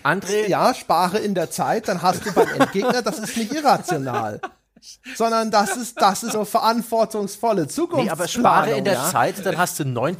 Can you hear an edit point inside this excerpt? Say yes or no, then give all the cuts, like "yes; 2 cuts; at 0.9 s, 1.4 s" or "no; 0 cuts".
yes; 1 cut; at 6.3 s